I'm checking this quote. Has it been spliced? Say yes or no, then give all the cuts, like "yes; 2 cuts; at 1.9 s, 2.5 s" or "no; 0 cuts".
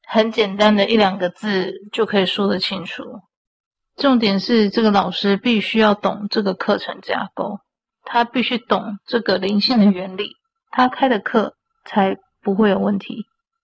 no; 0 cuts